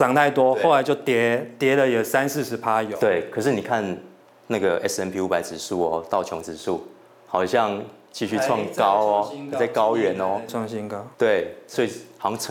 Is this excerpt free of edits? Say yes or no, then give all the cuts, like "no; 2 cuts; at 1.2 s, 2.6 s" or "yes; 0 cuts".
yes; 0 cuts